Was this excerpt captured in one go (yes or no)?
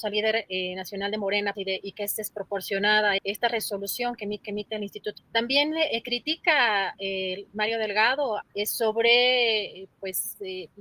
no